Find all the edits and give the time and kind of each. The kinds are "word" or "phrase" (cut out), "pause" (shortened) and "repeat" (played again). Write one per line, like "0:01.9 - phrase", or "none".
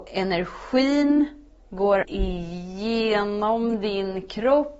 0:02.0 - word